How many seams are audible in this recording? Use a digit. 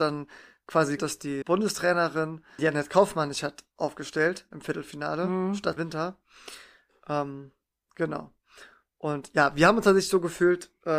4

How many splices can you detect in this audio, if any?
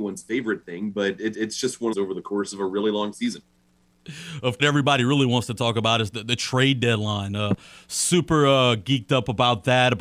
3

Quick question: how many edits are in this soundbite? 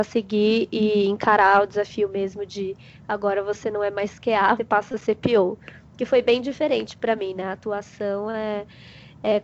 1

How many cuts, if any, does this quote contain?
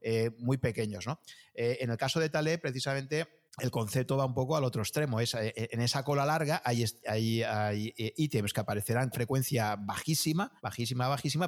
4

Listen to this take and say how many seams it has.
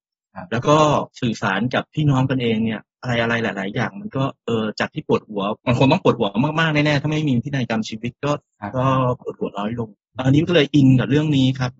3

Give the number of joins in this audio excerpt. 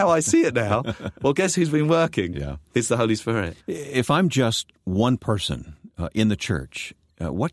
1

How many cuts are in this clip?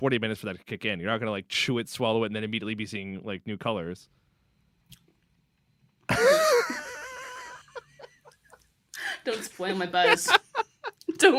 0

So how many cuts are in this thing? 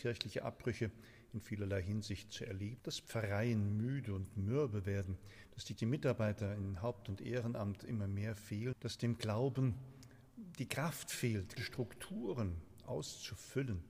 4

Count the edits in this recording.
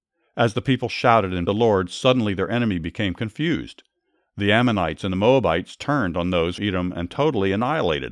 2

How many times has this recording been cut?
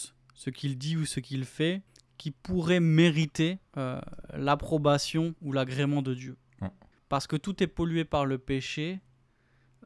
4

